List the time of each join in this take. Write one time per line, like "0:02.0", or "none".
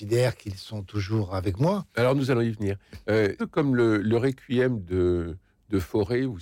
0:03.4